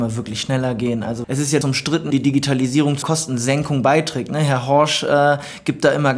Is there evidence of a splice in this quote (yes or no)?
yes